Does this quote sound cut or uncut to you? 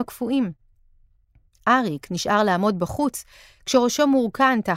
uncut